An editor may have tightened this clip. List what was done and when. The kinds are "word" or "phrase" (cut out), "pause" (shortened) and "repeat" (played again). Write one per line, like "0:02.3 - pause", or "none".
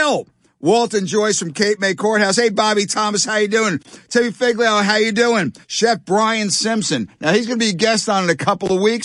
0:05.6 - pause